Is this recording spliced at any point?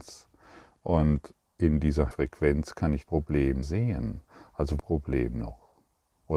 yes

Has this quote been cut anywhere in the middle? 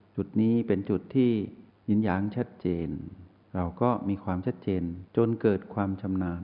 yes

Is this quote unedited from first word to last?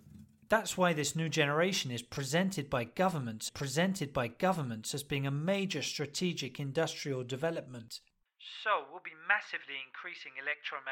no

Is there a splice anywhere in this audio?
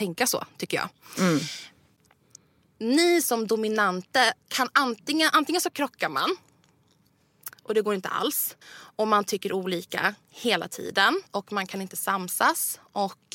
yes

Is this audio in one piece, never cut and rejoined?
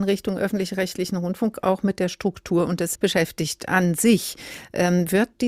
no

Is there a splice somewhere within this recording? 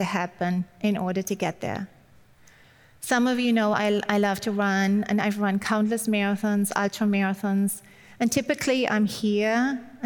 no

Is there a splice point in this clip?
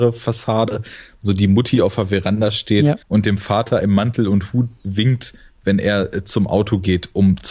yes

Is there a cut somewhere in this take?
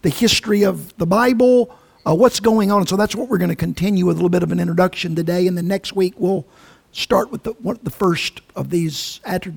no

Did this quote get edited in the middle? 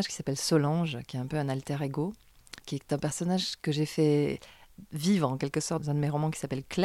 yes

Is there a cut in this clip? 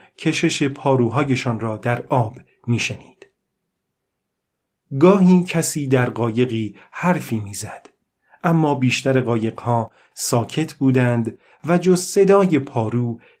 no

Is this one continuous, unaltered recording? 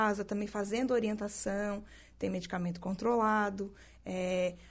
yes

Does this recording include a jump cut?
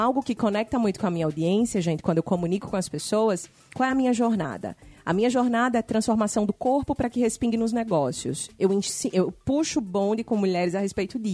no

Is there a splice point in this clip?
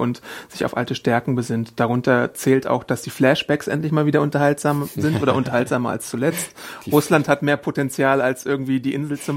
no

